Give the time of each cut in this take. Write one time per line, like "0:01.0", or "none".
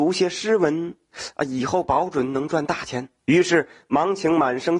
0:03.2